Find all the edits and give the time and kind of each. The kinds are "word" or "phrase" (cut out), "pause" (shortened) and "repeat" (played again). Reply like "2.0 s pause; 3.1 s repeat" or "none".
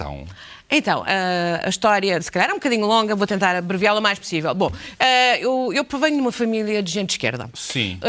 none